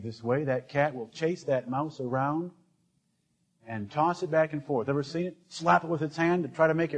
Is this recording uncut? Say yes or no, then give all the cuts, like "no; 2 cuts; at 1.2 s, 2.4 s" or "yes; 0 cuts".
yes; 0 cuts